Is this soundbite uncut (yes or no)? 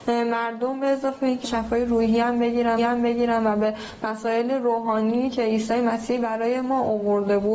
no